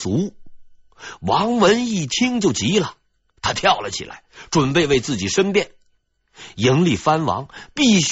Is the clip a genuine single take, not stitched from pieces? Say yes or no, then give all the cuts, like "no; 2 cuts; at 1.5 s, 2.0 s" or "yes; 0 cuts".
yes; 0 cuts